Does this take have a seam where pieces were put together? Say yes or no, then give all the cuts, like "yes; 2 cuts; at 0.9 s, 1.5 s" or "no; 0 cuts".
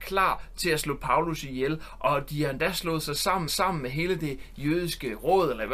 yes; 1 cut; at 3.5 s